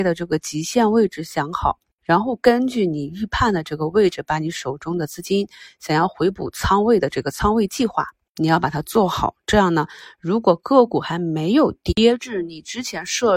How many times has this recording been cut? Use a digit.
0